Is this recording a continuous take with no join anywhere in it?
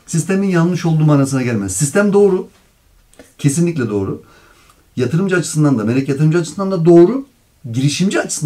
yes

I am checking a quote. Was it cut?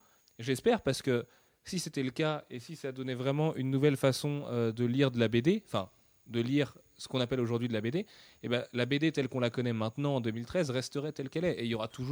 no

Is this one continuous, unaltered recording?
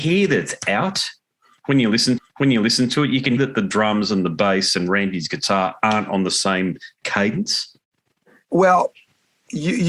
no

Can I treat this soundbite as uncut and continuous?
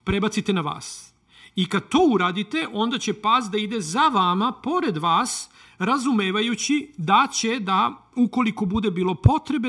yes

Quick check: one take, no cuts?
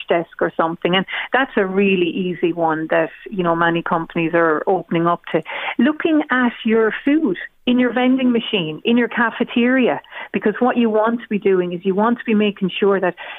yes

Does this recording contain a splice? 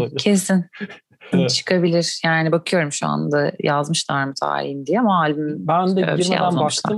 yes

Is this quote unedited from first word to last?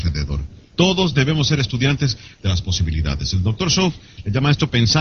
yes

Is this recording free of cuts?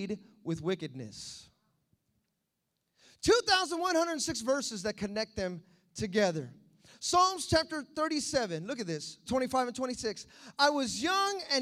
no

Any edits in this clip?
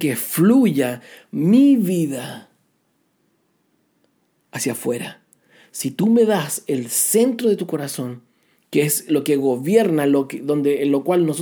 no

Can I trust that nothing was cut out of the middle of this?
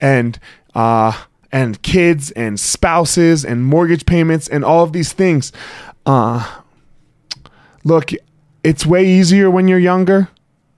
no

